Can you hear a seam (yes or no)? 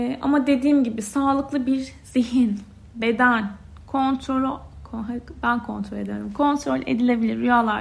no